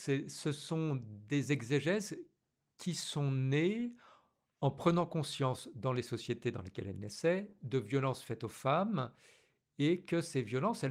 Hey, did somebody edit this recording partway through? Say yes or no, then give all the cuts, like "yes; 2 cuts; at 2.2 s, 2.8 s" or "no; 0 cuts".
no; 0 cuts